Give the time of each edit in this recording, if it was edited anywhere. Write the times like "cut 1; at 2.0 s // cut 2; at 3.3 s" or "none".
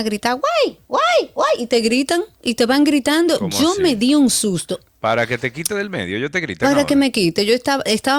none